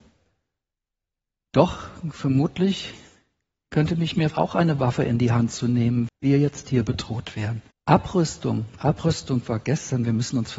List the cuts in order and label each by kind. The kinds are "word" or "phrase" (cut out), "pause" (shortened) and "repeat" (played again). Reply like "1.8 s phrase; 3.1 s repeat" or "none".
4.3 s word; 6.1 s word; 7.7 s pause